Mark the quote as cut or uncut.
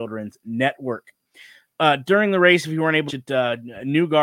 cut